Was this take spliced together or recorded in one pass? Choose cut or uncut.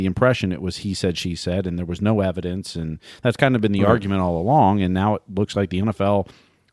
uncut